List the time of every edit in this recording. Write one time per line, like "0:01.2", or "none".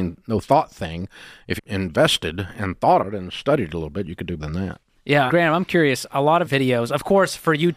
0:01.6
0:03.0
0:04.4
0:05.3
0:06.5